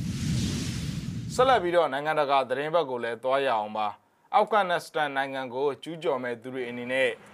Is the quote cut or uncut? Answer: uncut